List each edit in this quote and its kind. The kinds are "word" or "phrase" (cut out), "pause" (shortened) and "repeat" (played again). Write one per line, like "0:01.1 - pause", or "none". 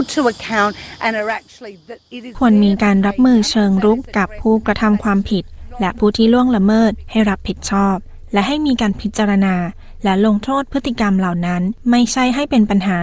none